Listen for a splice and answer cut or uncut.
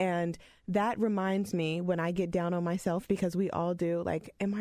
uncut